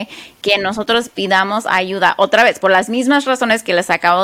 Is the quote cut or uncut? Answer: uncut